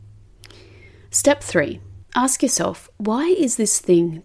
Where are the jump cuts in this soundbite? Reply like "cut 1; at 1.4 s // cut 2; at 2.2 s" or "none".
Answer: none